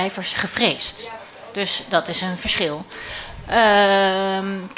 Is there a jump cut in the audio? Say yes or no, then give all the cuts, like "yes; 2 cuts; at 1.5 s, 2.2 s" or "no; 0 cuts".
no; 0 cuts